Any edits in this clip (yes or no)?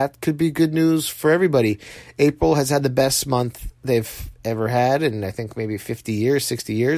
yes